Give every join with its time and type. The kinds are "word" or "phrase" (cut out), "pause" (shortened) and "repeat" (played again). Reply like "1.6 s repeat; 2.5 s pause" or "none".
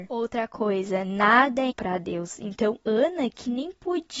1.7 s word